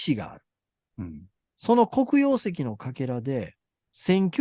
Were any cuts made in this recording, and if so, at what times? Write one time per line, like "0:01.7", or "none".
none